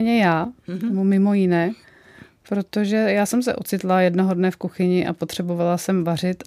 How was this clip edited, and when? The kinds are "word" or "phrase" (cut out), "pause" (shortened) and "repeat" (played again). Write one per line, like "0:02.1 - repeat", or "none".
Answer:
none